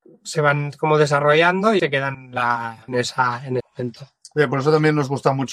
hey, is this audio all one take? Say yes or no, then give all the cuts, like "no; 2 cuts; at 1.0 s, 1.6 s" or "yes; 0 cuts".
no; 4 cuts; at 1.8 s, 2.1 s, 2.9 s, 3.6 s